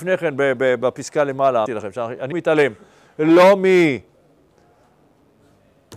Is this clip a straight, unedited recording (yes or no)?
no